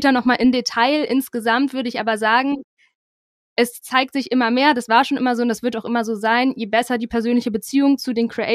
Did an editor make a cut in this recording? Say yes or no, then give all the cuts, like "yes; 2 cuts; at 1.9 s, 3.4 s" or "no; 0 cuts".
no; 0 cuts